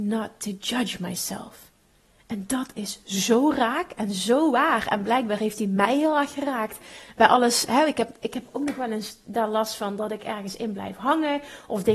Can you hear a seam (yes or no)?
no